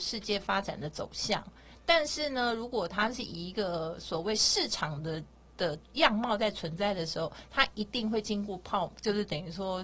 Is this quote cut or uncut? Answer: uncut